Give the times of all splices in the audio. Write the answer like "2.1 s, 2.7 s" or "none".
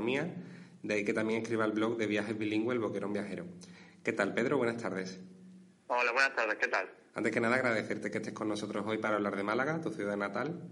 none